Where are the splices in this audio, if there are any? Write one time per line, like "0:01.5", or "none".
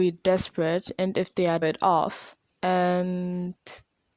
0:01.6
0:02.4

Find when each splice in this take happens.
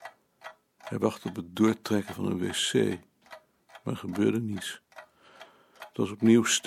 none

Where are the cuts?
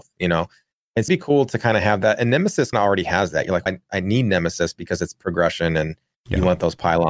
0:01.1
0:02.7
0:03.7

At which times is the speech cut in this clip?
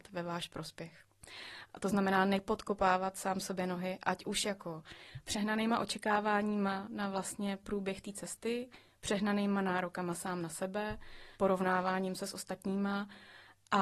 0:11.3

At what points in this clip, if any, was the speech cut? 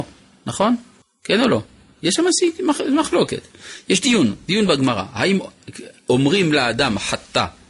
none

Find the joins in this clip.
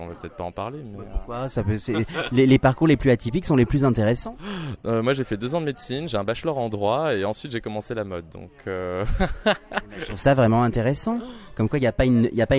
none

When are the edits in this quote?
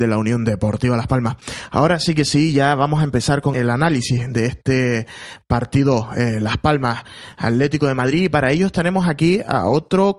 none

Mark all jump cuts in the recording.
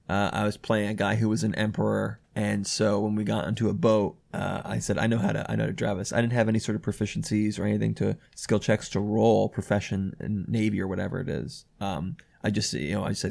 none

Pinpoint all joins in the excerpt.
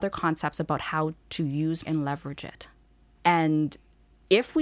0:01.8
0:03.2

